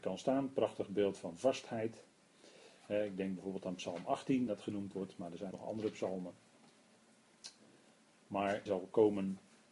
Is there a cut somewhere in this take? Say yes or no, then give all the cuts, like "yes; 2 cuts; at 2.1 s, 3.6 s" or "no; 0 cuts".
yes; 3 cuts; at 4.5 s, 5.5 s, 8.7 s